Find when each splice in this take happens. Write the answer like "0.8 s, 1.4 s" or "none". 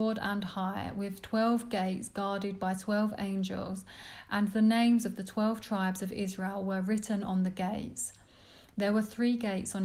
none